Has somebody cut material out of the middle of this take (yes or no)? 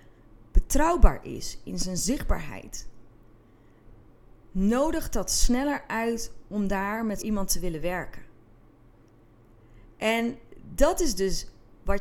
yes